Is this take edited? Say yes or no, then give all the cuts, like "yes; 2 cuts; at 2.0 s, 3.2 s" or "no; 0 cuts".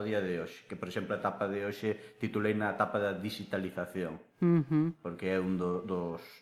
no; 0 cuts